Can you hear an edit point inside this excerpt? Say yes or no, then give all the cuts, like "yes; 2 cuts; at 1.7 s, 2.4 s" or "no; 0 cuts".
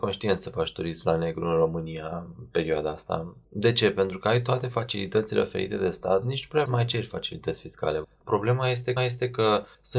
yes; 3 cuts; at 3.4 s, 6.7 s, 9.0 s